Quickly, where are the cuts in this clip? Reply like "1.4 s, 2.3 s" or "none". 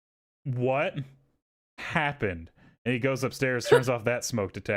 none